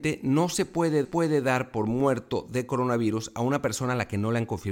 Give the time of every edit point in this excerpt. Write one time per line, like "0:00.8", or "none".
0:01.0